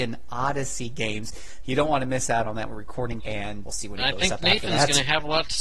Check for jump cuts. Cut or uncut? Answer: cut